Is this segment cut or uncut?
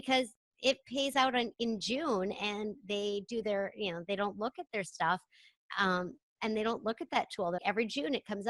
cut